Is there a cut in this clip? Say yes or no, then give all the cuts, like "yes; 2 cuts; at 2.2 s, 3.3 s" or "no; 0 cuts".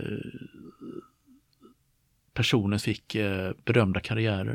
yes; 1 cut; at 2.8 s